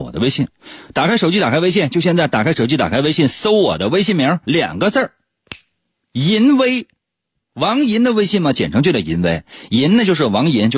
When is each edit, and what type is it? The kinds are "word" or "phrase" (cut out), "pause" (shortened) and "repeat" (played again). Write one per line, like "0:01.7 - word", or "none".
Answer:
0:04.4 - pause